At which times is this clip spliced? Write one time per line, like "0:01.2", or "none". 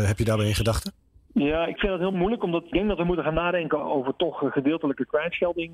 0:01.8
0:02.7
0:03.8